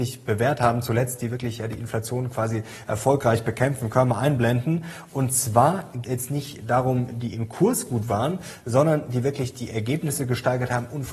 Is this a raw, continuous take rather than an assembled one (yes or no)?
no